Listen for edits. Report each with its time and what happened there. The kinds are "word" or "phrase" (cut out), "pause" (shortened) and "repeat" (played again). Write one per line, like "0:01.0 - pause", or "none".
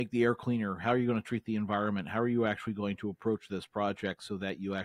none